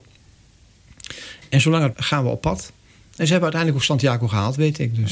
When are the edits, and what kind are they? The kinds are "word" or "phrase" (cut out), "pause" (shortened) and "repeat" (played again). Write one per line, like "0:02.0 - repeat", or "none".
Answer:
0:01.9 - word

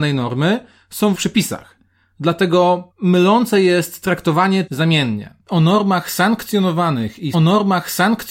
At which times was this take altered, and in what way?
0:01.1 - word
0:02.9 - pause
0:04.7 - phrase
0:07.3 - repeat

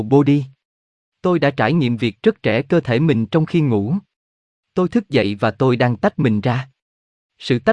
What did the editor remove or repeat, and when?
none

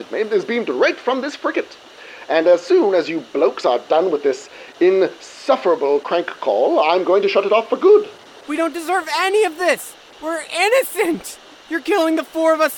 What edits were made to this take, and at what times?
none

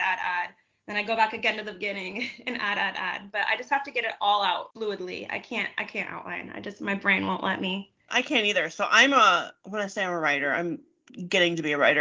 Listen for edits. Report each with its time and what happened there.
0:04.7 - word
0:08.0 - pause

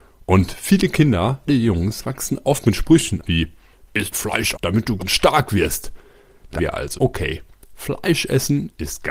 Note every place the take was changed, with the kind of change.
0:01.5 - word
0:02.4 - word
0:03.2 - word
0:04.1 - word
0:04.5 - word
0:05.0 - word
0:06.6 - word
0:07.0 - word

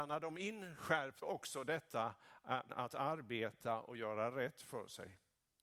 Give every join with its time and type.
0:01.2 - word
0:02.7 - word

